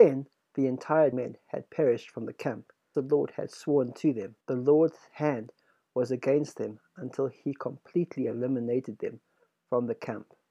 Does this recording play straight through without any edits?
no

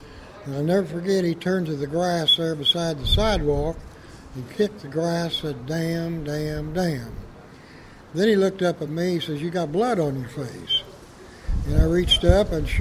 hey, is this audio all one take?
yes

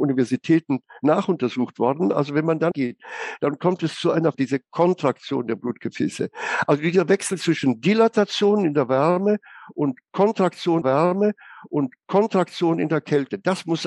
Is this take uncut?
no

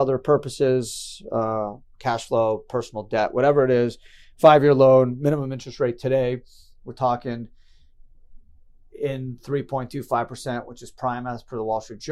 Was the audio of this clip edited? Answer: no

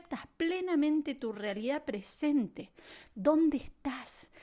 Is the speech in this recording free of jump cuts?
yes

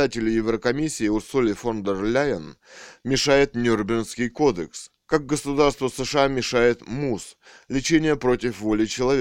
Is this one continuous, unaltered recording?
no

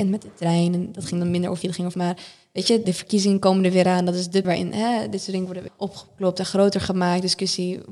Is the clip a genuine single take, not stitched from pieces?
no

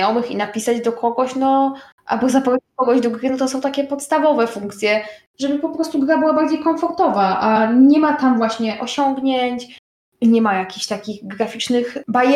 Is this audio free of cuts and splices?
yes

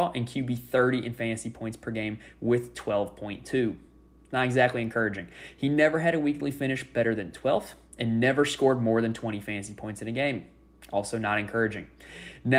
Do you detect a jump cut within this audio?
no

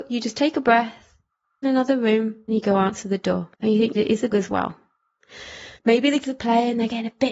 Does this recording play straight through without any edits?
no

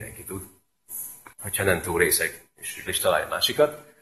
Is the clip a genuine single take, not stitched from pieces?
no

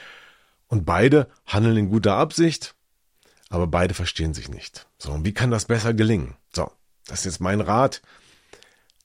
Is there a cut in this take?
yes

